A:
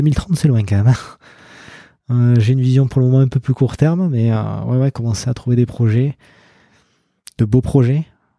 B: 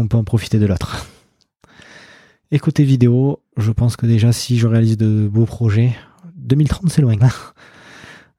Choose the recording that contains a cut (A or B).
B